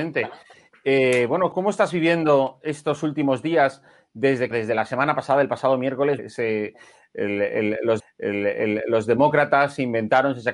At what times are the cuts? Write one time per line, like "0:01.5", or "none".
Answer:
0:01.5
0:04.5
0:06.2
0:08.0